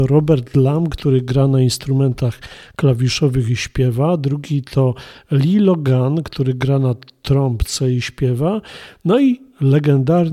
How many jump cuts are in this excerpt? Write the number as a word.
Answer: zero